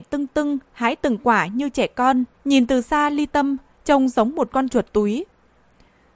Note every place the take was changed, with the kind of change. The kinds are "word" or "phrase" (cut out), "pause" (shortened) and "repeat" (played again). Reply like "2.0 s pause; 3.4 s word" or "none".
2.3 s pause